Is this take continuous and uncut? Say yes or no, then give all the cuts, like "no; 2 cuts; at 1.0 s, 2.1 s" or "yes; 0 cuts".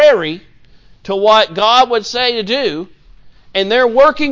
yes; 0 cuts